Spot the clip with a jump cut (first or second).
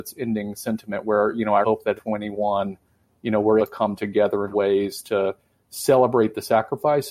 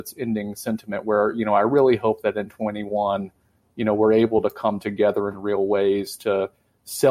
first